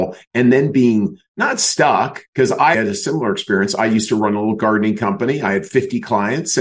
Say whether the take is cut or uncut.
cut